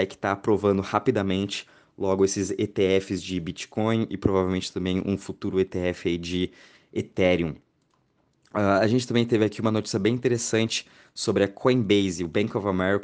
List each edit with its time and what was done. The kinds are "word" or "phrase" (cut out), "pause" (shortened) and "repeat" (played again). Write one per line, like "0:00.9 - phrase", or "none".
none